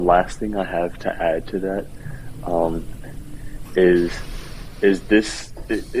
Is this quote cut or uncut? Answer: uncut